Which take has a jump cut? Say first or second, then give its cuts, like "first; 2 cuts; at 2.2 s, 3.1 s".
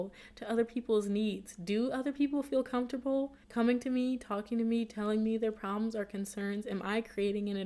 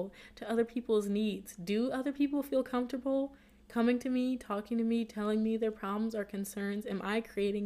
first; 1 cut; at 3.4 s